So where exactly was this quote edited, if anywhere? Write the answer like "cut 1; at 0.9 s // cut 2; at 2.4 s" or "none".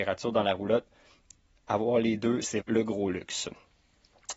cut 1; at 2.6 s